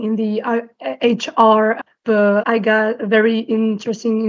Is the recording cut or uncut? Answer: cut